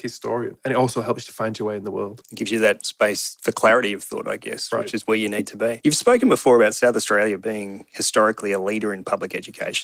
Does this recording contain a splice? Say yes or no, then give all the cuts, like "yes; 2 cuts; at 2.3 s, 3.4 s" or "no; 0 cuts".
no; 0 cuts